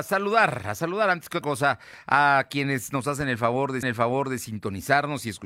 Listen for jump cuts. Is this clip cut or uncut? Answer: cut